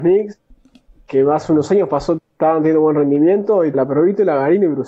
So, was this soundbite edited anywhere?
yes; 2 cuts; at 2.2 s, 3.7 s

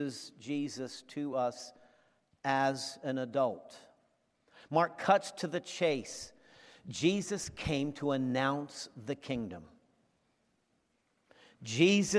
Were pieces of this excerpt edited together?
no; 0 cuts

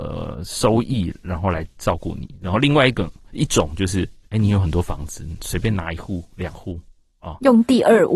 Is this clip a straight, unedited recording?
yes; 0 cuts

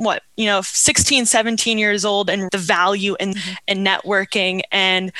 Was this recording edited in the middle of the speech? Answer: yes; 2 cuts; at 2.5 s, 3.3 s

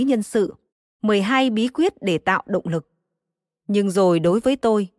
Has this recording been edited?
no; 0 cuts

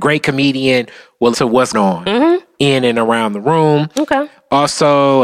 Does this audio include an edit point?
yes; 2 cuts; at 1.3 s, 1.7 s

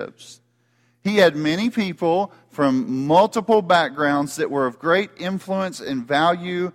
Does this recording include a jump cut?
no; 0 cuts

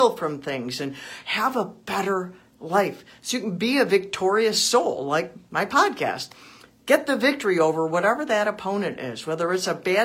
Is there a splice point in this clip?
no; 0 cuts

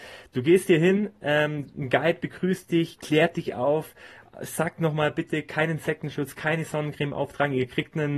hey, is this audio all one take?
yes; 0 cuts

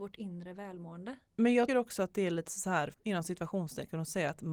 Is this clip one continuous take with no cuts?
no; 2 cuts; at 1.7 s, 2.9 s

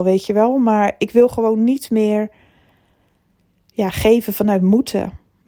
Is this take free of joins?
yes; 0 cuts

